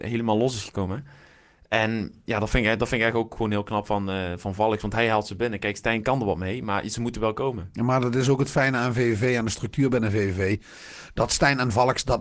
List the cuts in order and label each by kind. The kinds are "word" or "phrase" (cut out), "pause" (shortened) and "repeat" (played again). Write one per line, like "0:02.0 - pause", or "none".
0:02.2 - pause